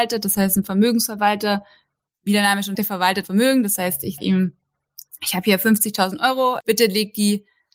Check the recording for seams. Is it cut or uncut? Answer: cut